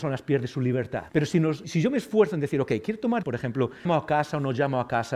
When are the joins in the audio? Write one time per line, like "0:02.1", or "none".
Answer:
0:01.1
0:01.6
0:03.2
0:03.9